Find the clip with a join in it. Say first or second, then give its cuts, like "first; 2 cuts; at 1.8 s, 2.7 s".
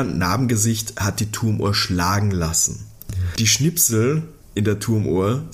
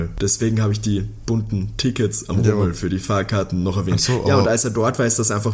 first; 1 cut; at 4.4 s